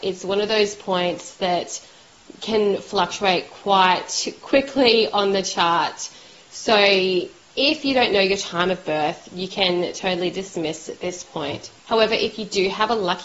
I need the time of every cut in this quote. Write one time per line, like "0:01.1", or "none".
0:11.8